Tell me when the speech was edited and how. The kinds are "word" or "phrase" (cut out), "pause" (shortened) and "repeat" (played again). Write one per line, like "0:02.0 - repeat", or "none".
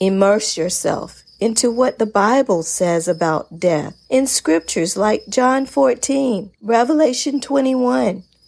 0:04.0 - pause
0:06.5 - pause